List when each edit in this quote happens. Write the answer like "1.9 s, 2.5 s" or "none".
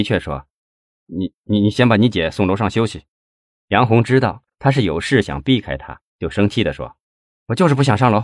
3.1 s, 6.1 s, 7.0 s